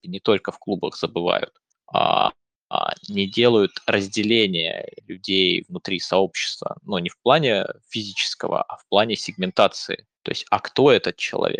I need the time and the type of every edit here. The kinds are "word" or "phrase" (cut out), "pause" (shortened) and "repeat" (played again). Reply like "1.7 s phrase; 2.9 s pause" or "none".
1.7 s pause; 5.0 s pause; 10.1 s pause